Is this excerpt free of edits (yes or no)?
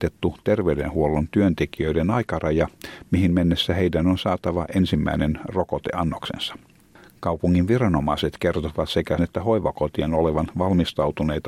no